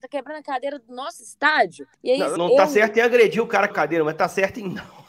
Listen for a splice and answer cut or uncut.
cut